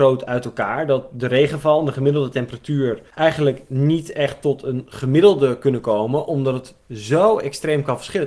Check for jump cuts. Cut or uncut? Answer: cut